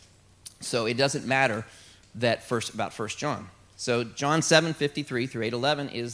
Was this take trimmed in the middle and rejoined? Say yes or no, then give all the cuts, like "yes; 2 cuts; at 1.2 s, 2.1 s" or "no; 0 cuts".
no; 0 cuts